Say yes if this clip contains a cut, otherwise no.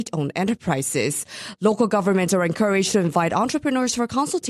no